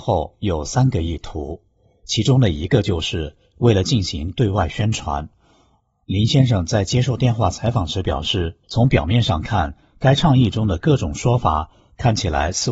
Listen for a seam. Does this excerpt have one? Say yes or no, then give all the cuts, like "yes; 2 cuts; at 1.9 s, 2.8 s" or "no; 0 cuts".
yes; 1 cut; at 8.6 s